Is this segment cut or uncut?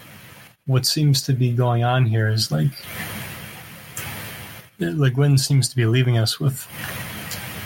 uncut